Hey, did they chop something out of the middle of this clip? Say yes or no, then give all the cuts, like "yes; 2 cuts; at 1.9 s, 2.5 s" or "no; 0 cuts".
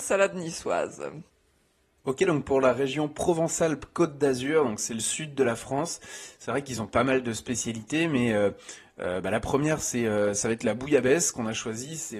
no; 0 cuts